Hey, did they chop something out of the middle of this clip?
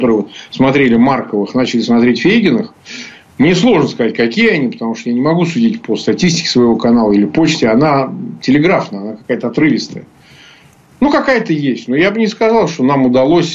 no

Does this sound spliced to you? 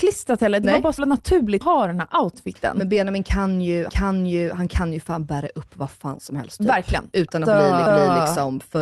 yes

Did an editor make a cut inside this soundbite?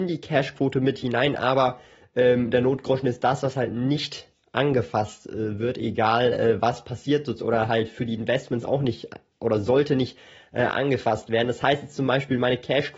no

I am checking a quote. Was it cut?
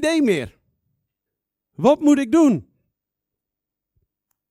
yes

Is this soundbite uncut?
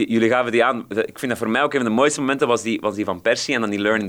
yes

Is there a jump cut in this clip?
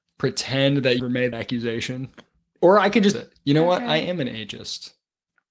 yes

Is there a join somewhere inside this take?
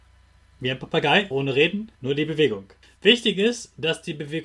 yes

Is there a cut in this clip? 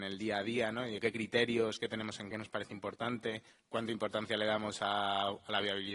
yes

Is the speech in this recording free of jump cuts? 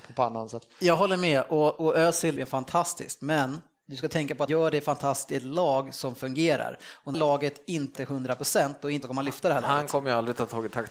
no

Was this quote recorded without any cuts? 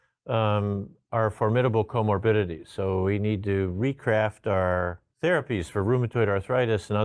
no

